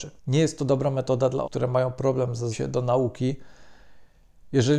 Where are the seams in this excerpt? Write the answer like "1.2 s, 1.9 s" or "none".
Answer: 1.4 s, 2.5 s